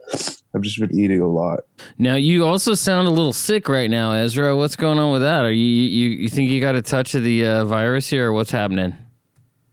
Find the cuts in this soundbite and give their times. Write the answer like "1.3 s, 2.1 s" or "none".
none